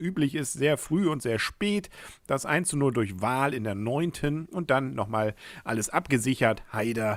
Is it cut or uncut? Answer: uncut